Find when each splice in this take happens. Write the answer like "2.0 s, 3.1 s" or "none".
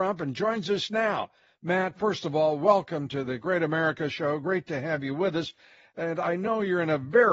none